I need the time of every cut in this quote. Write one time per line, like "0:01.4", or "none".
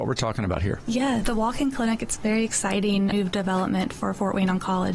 0:01.2
0:03.1